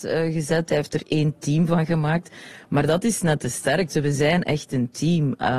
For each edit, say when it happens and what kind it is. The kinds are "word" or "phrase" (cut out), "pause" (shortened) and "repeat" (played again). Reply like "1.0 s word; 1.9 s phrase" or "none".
none

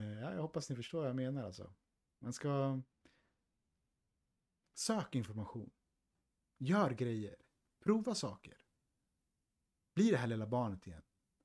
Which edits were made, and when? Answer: none

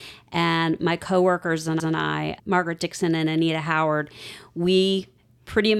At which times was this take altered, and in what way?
1.8 s repeat

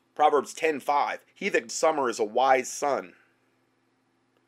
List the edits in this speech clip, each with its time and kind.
1.3 s pause; 1.7 s phrase

